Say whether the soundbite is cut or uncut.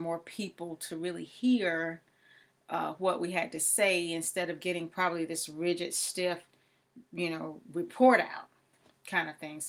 uncut